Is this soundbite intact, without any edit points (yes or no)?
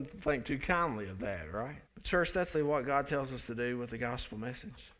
no